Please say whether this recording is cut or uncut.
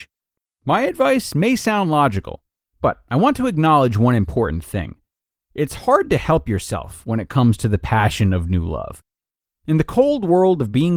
uncut